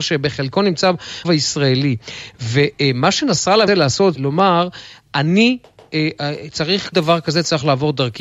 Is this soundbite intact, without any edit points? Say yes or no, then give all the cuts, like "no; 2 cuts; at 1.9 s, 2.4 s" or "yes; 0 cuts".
no; 4 cuts; at 1.2 s, 3.7 s, 4.1 s, 6.9 s